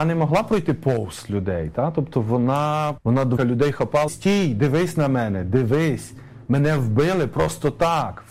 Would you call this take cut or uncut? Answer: cut